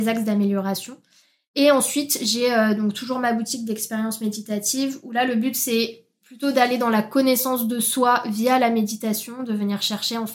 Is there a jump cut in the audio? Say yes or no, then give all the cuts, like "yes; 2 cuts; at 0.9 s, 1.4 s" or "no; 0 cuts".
no; 0 cuts